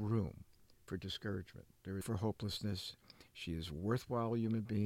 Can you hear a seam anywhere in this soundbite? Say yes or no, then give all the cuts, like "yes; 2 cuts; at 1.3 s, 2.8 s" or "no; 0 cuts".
yes; 1 cut; at 2.0 s